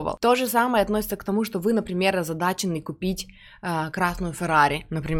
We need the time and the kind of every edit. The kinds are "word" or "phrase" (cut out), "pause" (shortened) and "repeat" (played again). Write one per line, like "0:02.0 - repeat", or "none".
none